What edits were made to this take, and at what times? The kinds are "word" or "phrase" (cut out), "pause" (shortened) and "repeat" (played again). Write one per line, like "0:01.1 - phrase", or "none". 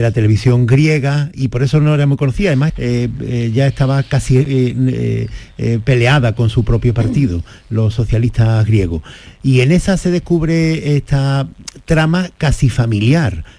0:01.3 - word
0:02.7 - word